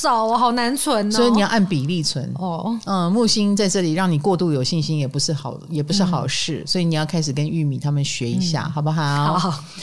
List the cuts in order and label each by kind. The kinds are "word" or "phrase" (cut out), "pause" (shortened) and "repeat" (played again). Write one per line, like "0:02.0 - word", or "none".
none